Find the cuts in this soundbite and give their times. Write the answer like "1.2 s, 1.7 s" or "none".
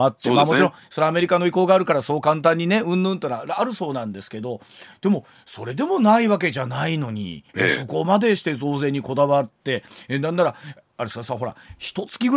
7.5 s

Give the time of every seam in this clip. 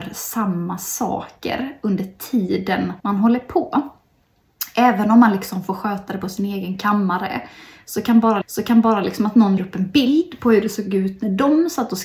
3.0 s, 8.4 s, 9.6 s

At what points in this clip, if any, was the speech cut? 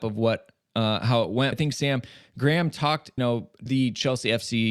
1.5 s, 3.2 s, 3.7 s

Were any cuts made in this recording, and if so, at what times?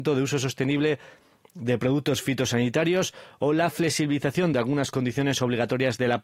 none

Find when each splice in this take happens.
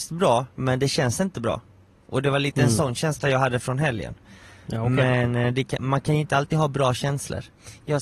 none

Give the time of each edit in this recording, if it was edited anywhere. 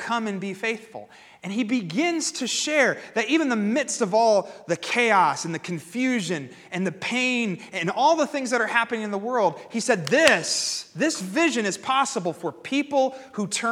none

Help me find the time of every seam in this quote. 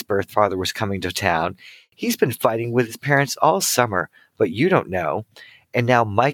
none

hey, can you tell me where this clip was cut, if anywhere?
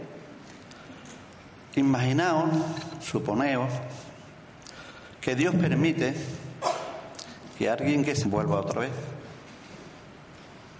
8.2 s

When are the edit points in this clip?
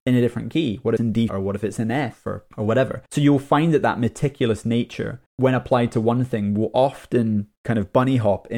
1.0 s, 1.3 s, 2.5 s, 3.1 s, 5.3 s, 7.6 s

